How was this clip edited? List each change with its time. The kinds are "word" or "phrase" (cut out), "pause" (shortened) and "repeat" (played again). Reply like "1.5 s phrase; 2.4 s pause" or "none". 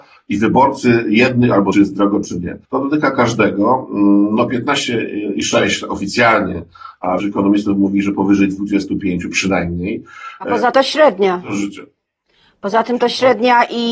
1.7 s phrase; 2.6 s pause; 7.2 s word; 10.7 s word